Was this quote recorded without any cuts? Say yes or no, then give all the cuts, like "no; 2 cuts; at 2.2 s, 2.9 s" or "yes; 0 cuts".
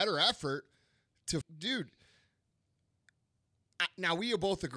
no; 1 cut; at 1.4 s